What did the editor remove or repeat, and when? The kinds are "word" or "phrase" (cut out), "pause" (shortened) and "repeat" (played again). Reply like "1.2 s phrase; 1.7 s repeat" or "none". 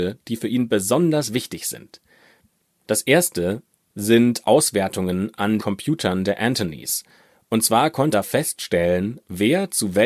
5.6 s word; 8.1 s word